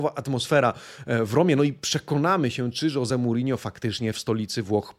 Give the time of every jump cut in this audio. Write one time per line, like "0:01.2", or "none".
none